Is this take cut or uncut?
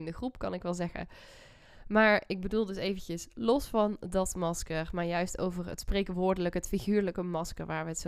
uncut